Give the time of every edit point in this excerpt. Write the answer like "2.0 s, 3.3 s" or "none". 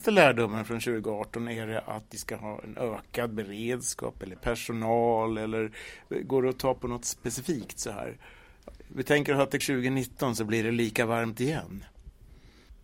4.4 s, 9.6 s